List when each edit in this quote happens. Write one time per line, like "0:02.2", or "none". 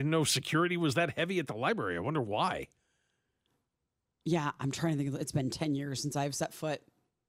none